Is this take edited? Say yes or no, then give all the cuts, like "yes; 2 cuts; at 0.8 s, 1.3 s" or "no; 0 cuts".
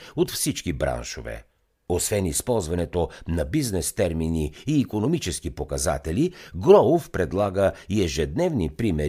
no; 0 cuts